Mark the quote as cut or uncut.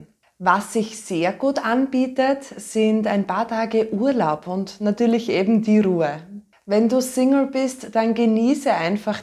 uncut